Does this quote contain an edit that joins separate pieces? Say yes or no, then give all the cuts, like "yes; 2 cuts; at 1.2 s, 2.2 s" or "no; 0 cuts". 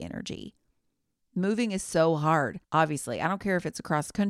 yes; 1 cut; at 2.6 s